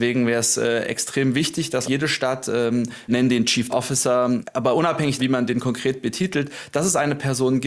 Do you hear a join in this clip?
yes; 4 cuts; at 1.8 s, 3.1 s, 3.7 s, 5.2 s

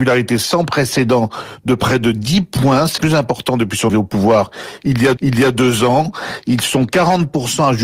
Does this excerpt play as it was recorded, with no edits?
no; 3 cuts; at 3.0 s, 3.9 s, 5.2 s

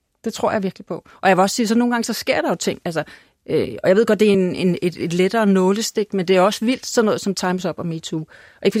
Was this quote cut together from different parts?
no; 0 cuts

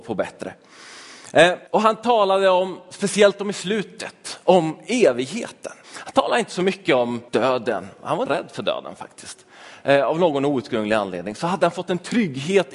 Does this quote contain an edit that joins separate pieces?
yes; 4 cuts; at 1.7 s, 5.8 s, 7.3 s, 8.3 s

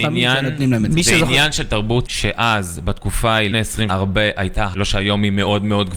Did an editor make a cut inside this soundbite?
yes; 4 cuts; at 2.1 s, 3.5 s, 3.9 s, 4.7 s

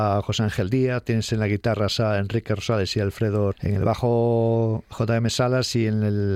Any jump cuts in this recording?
yes; 1 cut; at 3.5 s

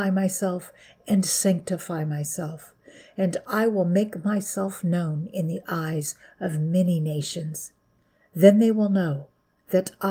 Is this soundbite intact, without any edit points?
yes; 0 cuts

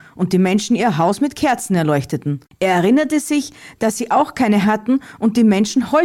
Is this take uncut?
no; 1 cut; at 4.6 s

